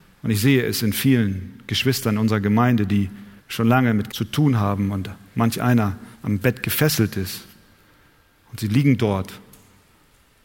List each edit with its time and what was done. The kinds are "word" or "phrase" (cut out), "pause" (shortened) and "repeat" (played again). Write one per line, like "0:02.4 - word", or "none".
0:03.4 - pause
0:04.1 - word
0:06.1 - pause